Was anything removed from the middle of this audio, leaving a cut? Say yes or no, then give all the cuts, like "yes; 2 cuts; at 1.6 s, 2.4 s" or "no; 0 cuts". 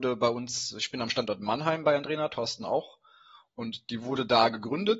no; 0 cuts